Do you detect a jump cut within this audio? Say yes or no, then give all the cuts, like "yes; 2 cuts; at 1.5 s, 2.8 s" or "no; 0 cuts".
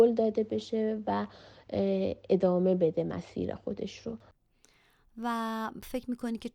no; 0 cuts